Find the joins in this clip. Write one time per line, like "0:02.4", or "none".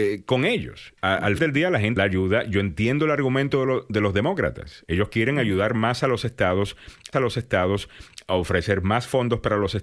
0:01.0
0:01.4
0:02.0
0:07.1